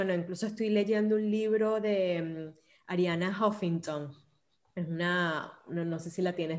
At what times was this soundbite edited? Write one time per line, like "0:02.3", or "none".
none